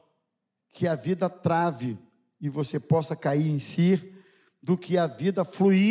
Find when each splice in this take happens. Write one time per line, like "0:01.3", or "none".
none